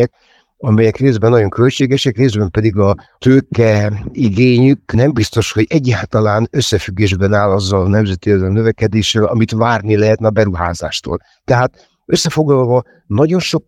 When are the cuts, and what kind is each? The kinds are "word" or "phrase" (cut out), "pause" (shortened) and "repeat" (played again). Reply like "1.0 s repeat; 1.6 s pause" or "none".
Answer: none